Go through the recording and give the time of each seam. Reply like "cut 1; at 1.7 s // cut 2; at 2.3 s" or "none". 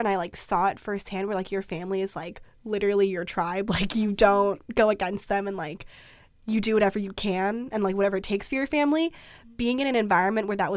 none